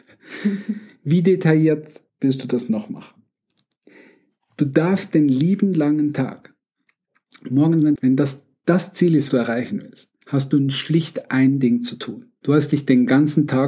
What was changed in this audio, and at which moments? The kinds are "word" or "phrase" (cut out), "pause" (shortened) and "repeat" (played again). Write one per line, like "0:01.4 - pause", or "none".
0:02.1 - pause
0:07.9 - phrase
0:09.3 - word
0:10.2 - pause
0:12.4 - pause